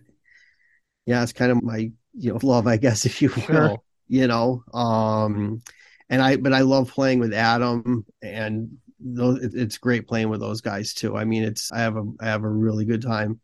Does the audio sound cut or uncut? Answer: cut